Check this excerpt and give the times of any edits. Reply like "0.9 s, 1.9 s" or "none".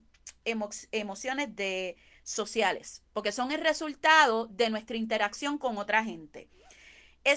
none